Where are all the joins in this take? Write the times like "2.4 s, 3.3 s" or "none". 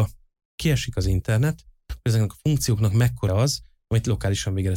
3.3 s